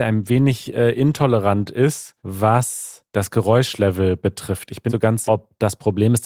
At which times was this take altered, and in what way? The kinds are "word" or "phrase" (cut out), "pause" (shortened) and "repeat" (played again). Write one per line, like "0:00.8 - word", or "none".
0:02.2 - pause
0:04.9 - phrase
0:05.3 - word